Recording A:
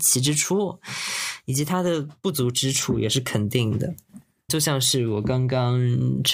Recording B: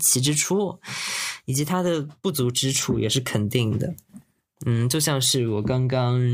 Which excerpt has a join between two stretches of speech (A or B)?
A